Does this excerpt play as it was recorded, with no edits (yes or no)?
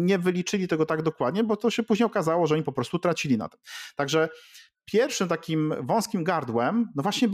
yes